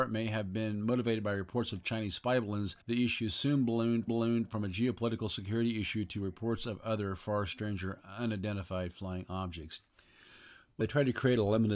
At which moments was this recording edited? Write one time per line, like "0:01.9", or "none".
0:02.8
0:04.1
0:10.8